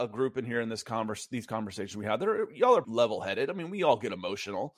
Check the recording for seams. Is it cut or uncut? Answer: cut